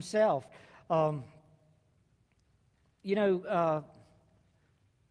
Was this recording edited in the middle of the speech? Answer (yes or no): no